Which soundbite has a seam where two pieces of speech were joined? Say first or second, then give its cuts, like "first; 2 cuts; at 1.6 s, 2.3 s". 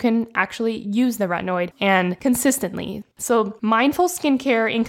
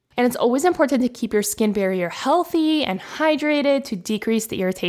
first; 2 cuts; at 1.7 s, 3.1 s